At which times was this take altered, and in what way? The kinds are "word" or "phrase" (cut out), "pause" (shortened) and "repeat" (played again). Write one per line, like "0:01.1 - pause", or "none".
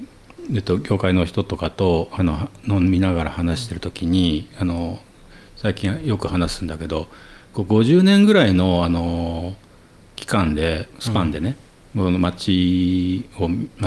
none